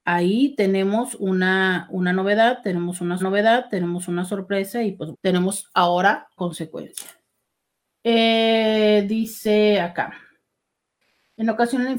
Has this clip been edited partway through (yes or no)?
yes